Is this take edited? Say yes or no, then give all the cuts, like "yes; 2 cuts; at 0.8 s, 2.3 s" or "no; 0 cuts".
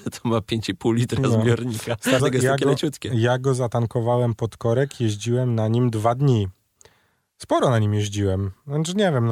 yes; 1 cut; at 2.2 s